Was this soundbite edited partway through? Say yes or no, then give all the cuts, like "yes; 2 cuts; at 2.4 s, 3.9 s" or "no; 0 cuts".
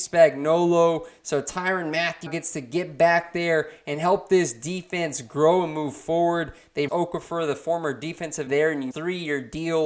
yes; 4 cuts; at 2.3 s, 6.9 s, 8.5 s, 8.9 s